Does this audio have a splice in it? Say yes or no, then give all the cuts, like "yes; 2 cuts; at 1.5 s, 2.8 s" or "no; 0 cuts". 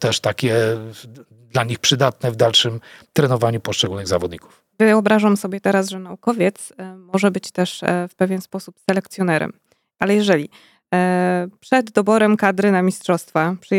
yes; 2 cuts; at 4.7 s, 10.0 s